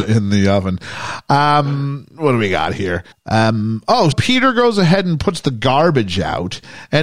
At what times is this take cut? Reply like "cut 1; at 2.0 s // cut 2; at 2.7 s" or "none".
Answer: cut 1; at 3.1 s // cut 2; at 4.1 s